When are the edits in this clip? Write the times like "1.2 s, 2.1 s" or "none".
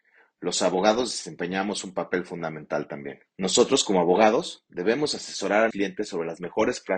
3.3 s, 5.7 s